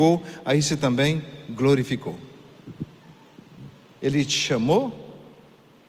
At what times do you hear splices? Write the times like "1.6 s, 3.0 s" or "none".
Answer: none